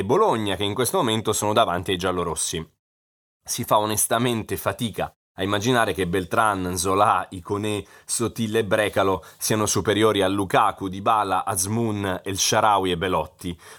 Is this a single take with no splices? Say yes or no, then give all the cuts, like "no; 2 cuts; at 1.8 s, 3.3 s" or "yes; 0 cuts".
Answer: yes; 0 cuts